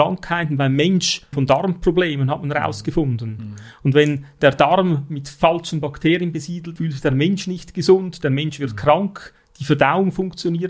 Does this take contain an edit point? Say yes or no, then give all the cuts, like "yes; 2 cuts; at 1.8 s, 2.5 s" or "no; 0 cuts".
yes; 2 cuts; at 1.3 s, 6.8 s